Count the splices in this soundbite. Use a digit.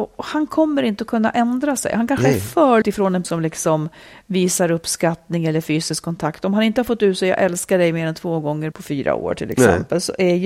3